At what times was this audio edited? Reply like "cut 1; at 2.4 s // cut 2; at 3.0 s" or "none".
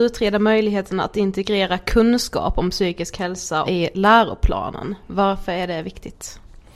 cut 1; at 3.6 s